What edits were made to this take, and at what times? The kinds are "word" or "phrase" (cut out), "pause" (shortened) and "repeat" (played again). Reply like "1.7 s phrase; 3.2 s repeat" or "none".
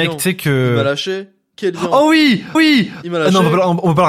2.5 s repeat